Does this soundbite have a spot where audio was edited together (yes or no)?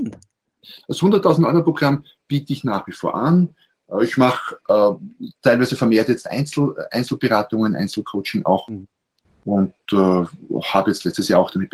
no